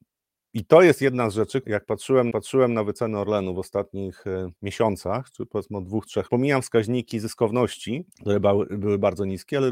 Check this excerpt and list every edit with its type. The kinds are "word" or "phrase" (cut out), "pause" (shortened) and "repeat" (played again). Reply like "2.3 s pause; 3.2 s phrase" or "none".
1.6 s word; 2.3 s repeat; 4.6 s pause; 6.3 s phrase; 8.1 s pause